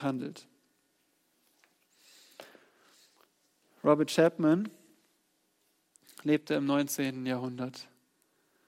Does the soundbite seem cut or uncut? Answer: uncut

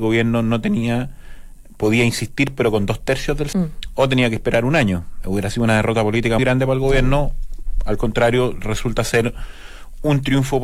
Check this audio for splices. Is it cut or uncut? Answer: cut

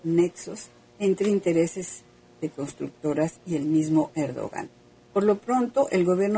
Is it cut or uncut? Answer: uncut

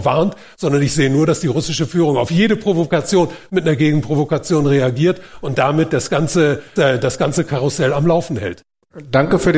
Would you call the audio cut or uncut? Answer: cut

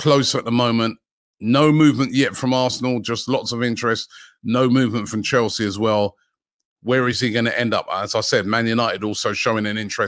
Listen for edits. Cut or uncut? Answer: uncut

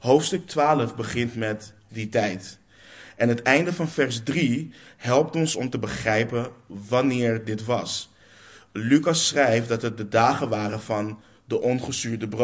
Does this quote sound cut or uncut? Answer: cut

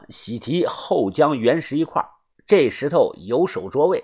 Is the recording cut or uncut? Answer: uncut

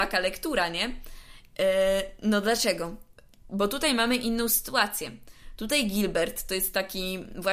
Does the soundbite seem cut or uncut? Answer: uncut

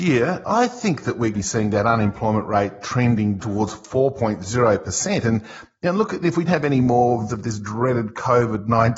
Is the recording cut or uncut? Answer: cut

